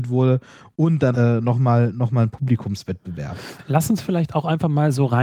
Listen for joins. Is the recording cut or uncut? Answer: cut